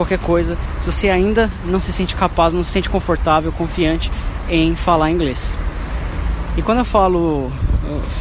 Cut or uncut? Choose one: uncut